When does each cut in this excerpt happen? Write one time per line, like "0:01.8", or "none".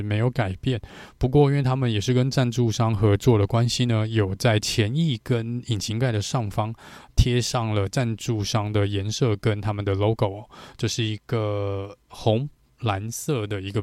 none